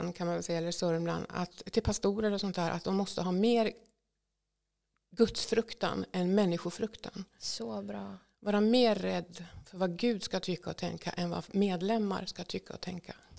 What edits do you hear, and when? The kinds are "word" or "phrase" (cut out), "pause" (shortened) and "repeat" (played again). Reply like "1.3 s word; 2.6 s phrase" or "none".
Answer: none